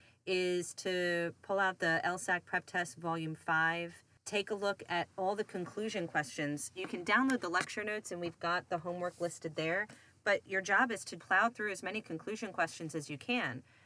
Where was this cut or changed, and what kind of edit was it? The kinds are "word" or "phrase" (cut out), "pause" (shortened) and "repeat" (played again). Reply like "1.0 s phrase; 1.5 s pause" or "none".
11.2 s word